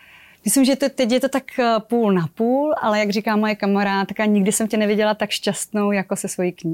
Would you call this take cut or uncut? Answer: uncut